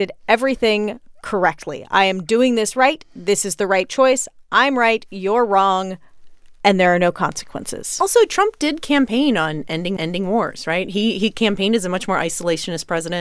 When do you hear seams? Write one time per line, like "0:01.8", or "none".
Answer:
0:10.0